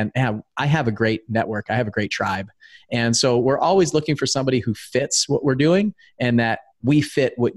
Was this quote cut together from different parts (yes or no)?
no